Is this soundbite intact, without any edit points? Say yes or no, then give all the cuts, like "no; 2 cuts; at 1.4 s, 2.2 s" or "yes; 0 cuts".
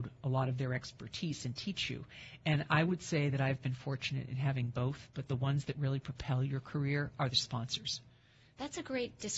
yes; 0 cuts